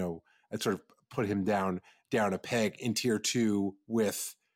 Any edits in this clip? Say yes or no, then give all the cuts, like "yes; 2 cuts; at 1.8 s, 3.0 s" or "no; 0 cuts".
no; 0 cuts